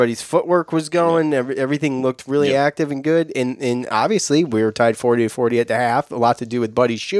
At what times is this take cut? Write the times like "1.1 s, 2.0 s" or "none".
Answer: none